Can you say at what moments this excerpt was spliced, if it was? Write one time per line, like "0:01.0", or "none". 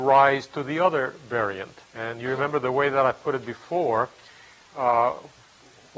0:01.9